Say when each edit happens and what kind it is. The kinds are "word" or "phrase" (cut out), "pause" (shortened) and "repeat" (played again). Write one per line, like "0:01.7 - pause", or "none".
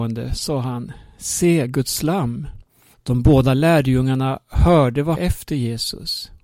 0:02.9 - pause
0:05.2 - phrase